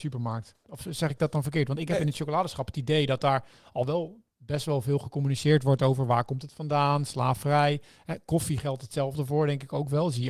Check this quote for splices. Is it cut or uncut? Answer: uncut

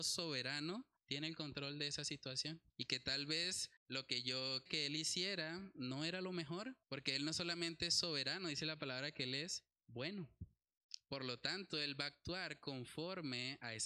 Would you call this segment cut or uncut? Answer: cut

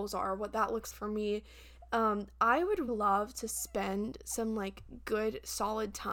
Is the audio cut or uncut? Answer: cut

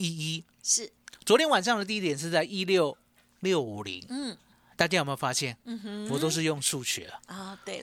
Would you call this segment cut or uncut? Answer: uncut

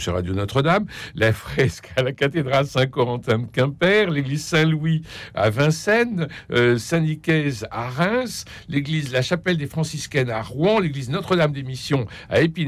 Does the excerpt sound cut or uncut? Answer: uncut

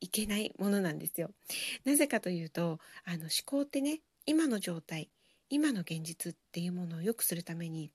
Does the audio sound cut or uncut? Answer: uncut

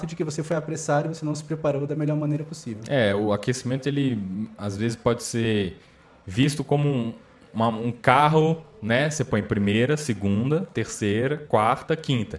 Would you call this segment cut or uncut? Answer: uncut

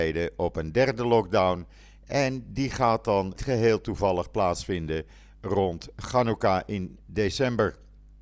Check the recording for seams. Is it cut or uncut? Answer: cut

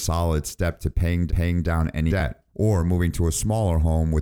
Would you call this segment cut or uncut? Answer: cut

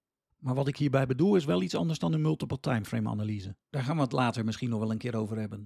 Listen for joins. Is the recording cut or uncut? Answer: cut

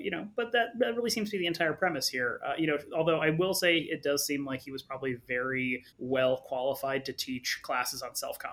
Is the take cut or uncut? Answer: cut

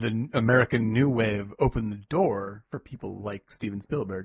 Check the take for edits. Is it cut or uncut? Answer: uncut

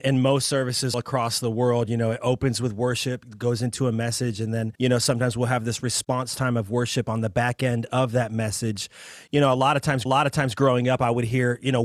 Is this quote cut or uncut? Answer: cut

